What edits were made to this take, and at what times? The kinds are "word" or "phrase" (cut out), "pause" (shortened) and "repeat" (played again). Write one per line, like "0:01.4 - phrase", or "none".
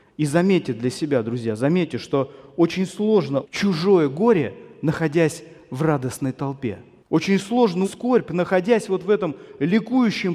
0:03.4 - word
0:07.0 - pause
0:07.8 - phrase